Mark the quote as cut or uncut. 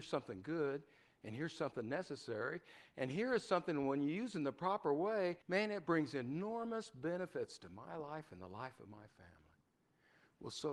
cut